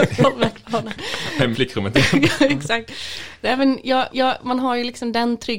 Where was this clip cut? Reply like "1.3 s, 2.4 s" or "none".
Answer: 1.5 s, 4.1 s